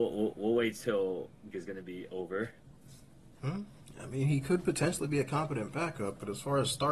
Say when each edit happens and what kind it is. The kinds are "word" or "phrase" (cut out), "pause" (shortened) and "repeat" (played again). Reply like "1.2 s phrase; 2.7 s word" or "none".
1.5 s phrase